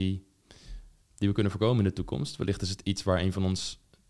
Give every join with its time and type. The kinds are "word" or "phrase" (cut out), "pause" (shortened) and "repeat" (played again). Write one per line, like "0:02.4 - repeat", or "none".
0:01.0 - pause